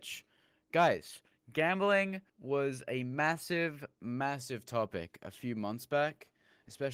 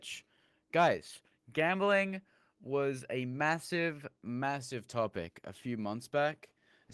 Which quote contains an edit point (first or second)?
first